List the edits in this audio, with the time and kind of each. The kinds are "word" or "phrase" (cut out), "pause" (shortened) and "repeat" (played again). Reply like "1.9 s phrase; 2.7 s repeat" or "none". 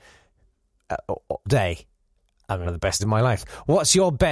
1.5 s word; 2.6 s word; 3.0 s word